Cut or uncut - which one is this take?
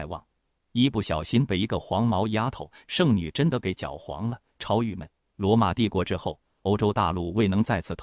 cut